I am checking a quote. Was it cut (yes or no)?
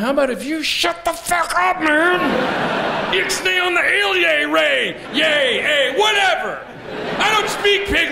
no